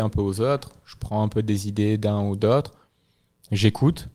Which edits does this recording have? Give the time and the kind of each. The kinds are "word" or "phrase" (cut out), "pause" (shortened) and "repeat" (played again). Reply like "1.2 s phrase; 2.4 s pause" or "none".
none